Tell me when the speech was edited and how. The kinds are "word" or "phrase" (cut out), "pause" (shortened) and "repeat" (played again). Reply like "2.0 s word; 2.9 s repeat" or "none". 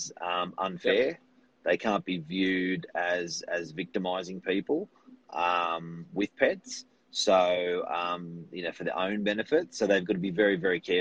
none